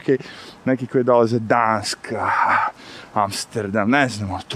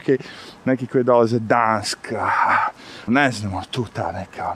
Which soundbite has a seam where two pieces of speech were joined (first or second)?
second